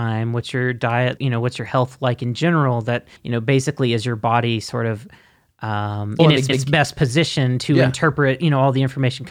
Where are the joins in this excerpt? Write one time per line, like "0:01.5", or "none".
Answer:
0:01.2
0:03.2
0:06.2
0:06.5